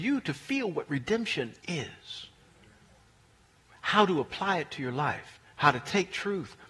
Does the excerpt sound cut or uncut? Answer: cut